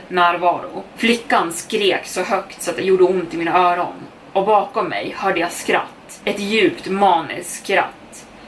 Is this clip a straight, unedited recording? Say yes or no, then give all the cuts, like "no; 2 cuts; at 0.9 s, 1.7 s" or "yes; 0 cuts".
yes; 0 cuts